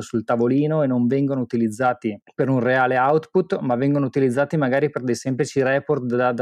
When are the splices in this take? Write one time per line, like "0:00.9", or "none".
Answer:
0:02.2